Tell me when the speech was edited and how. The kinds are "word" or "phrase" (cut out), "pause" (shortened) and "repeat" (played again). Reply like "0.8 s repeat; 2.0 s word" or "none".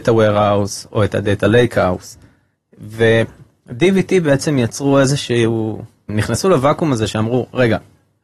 none

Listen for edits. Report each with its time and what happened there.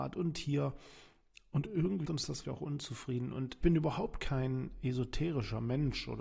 2.0 s word; 2.4 s word; 3.6 s word

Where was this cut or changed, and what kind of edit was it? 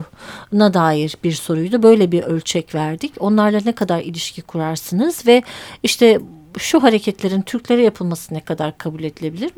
none

